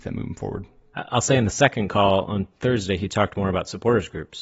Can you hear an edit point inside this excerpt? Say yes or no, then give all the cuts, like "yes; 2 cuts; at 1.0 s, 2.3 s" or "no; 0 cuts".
no; 0 cuts